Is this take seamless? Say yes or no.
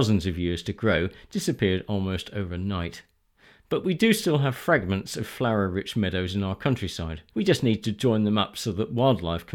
no